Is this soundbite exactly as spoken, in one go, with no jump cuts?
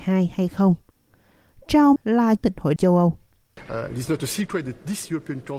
no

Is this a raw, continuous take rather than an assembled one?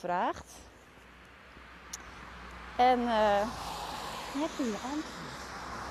no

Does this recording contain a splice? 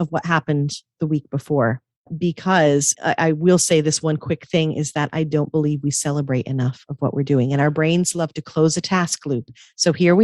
yes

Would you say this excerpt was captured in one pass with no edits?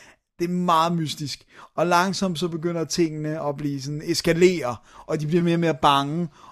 yes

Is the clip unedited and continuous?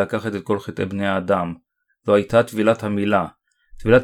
yes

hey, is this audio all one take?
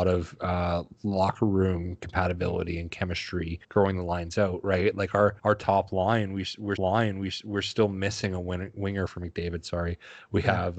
no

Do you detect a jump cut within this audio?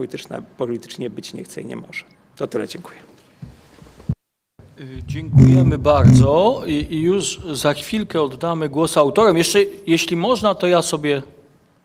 yes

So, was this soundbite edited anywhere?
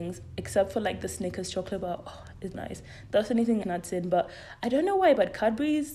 yes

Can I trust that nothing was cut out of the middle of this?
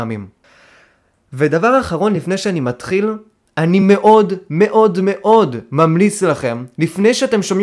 yes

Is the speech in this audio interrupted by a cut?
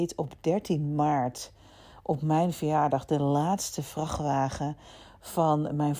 no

